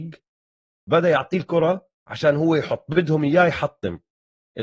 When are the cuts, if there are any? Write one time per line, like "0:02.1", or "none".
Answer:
0:01.9

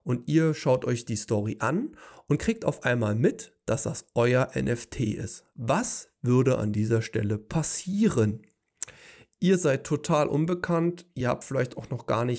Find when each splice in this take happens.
none

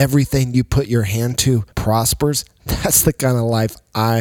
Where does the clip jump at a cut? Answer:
0:01.7

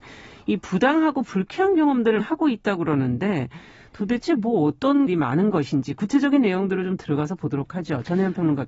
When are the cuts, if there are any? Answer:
0:02.2
0:05.1

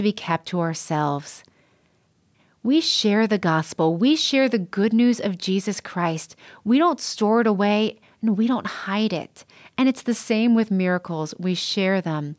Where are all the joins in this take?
none

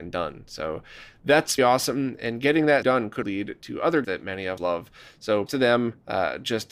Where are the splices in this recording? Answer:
0:01.6
0:02.8
0:03.2
0:04.0
0:04.6
0:05.5

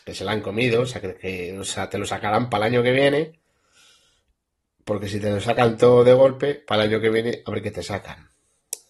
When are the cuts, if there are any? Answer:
none

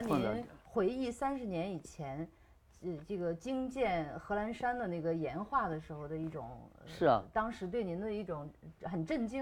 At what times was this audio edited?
none

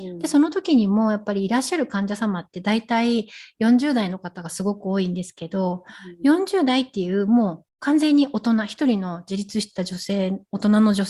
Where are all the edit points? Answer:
0:07.7

